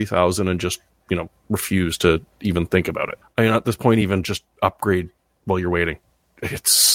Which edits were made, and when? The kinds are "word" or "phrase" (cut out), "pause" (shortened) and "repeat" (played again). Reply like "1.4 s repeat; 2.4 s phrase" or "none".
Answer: none